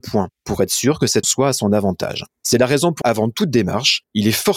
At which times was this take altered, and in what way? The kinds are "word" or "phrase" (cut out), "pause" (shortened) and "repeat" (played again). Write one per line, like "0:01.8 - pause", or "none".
0:01.2 - word
0:03.0 - word